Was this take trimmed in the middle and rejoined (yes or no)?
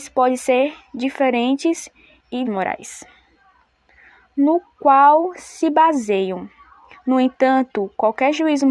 yes